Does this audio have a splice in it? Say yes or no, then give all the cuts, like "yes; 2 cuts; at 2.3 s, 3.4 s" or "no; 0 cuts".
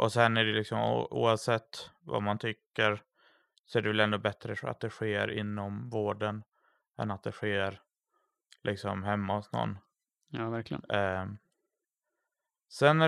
no; 0 cuts